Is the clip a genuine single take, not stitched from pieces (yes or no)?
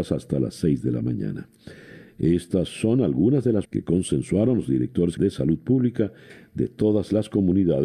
no